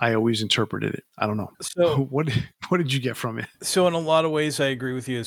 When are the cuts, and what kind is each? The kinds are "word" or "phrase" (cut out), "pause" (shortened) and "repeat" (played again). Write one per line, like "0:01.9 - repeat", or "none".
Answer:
0:01.1 - pause
0:01.5 - pause